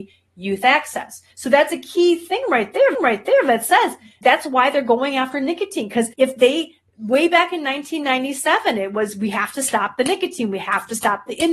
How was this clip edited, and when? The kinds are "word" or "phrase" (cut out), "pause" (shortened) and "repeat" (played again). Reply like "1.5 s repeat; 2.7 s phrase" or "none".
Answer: 1.3 s pause; 2.9 s repeat; 4.2 s word; 6.1 s pause